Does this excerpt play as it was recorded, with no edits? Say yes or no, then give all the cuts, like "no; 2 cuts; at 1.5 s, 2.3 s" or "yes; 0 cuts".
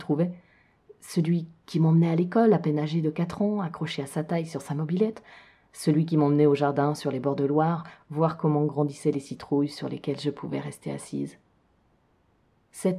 yes; 0 cuts